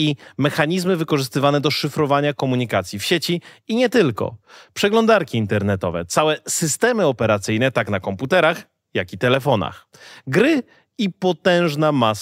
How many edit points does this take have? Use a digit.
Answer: 0